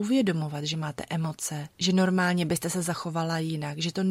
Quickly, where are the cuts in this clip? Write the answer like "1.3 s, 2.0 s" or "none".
1.7 s